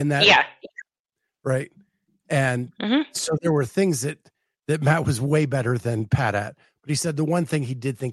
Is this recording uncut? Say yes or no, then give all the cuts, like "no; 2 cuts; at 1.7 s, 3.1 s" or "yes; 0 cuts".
yes; 0 cuts